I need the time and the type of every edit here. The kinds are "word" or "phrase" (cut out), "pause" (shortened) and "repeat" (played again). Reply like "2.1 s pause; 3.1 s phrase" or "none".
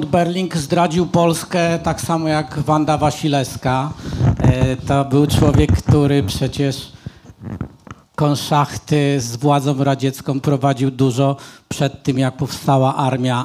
none